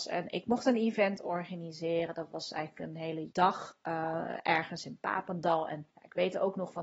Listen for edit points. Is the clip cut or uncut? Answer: cut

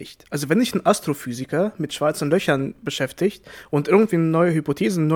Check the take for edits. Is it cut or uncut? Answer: uncut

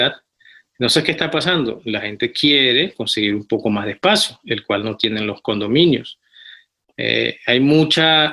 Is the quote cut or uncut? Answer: uncut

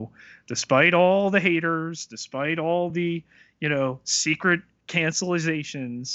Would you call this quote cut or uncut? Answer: uncut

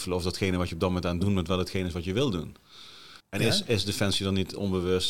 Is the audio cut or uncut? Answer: cut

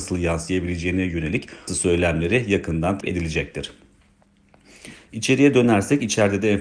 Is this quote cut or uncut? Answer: cut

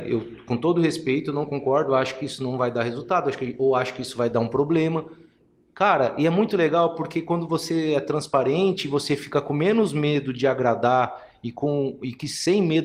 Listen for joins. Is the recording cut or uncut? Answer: uncut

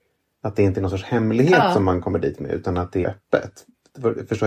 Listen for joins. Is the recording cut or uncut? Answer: cut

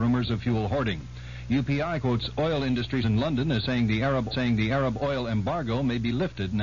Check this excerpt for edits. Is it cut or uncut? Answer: cut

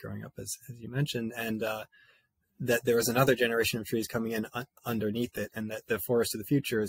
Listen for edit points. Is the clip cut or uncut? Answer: uncut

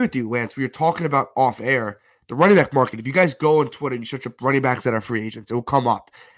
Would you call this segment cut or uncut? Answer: uncut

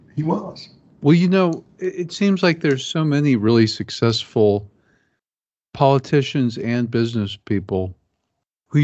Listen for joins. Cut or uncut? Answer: uncut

